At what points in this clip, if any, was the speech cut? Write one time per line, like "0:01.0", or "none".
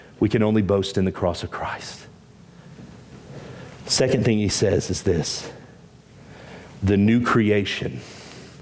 none